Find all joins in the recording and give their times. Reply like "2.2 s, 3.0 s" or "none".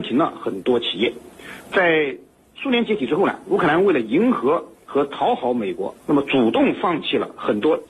2.3 s, 6.0 s